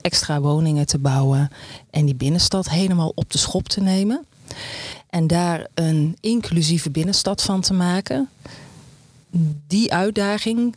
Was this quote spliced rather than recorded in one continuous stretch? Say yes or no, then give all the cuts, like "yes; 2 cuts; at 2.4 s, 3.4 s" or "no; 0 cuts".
no; 0 cuts